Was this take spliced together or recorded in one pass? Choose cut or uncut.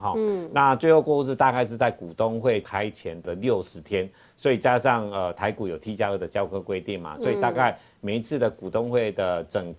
uncut